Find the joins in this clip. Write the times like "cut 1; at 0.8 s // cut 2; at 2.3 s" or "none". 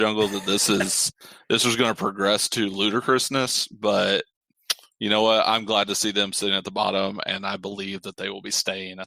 none